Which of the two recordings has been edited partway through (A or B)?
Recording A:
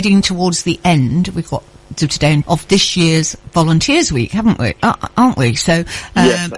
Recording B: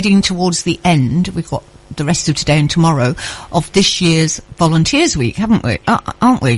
A